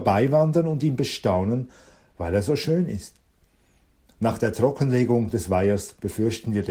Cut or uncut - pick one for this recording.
uncut